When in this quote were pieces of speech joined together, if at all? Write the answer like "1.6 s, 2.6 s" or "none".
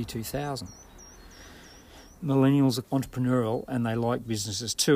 2.2 s, 2.8 s